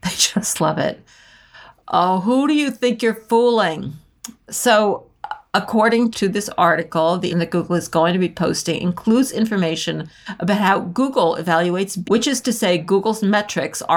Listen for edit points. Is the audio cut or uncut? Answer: cut